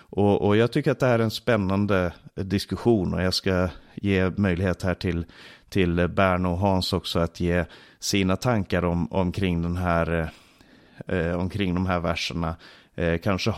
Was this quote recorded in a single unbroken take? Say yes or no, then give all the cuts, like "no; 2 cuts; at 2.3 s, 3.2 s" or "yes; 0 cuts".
yes; 0 cuts